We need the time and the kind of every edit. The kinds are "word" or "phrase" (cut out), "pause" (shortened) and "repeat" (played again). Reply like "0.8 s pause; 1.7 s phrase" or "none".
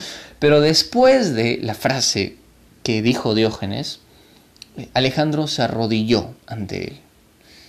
2.7 s pause; 6.4 s pause